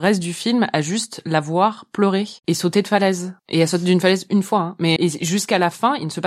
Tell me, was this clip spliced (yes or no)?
yes